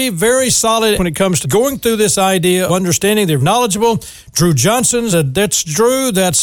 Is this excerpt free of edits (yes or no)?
no